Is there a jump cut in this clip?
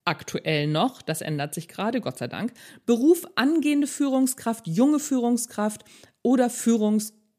no; 0 cuts

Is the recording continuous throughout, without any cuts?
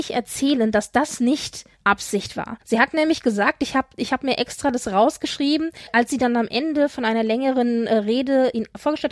no; 2 cuts; at 1.7 s, 2.6 s

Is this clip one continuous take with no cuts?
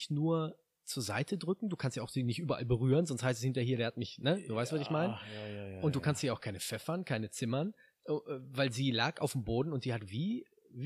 yes; 0 cuts

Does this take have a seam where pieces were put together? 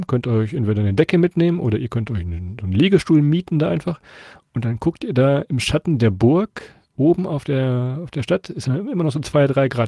no; 0 cuts

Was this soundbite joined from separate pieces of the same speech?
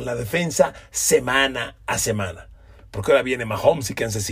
no; 0 cuts

